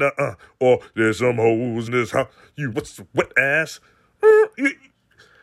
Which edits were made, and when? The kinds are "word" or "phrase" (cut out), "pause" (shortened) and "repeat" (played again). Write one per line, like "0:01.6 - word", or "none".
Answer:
0:01.9 - word
0:02.7 - word